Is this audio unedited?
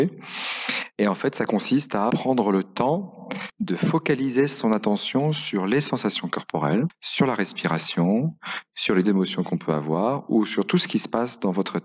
no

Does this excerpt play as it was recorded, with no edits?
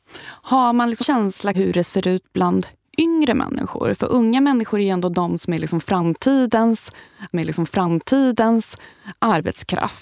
no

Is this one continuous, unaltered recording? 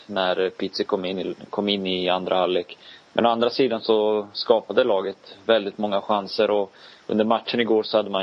yes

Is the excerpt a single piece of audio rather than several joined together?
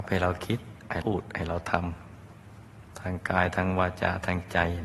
no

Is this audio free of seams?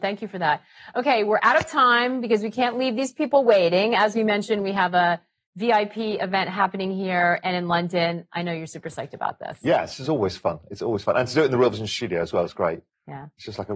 yes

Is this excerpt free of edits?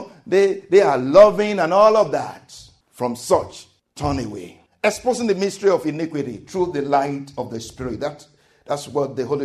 yes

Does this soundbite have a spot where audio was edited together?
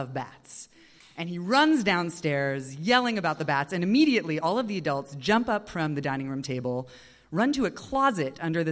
no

